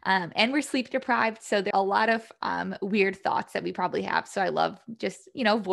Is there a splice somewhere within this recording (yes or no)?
yes